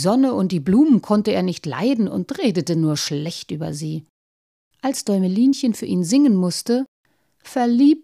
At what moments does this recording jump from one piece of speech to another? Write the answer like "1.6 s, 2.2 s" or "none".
none